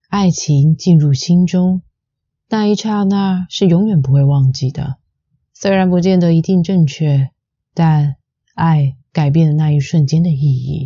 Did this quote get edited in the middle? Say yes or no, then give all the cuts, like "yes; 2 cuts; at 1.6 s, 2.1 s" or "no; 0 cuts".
no; 0 cuts